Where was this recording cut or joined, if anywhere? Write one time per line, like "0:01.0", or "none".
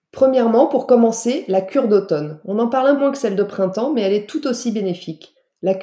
0:03.0